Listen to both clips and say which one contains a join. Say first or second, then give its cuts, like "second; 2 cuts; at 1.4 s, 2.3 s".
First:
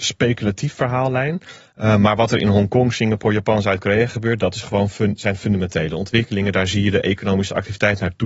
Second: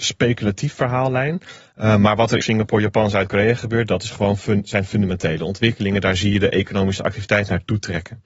second; 1 cut; at 2.4 s